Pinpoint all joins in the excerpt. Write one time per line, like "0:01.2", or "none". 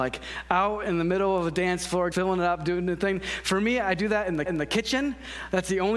0:02.1
0:04.5